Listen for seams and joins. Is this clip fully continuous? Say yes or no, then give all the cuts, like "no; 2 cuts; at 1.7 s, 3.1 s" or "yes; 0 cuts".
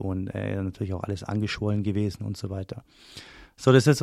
yes; 0 cuts